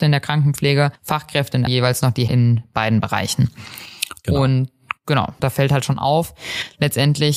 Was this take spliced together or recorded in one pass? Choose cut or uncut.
cut